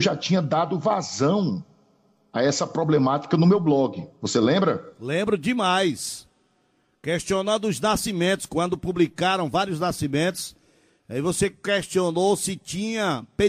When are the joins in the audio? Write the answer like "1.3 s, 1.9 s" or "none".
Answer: none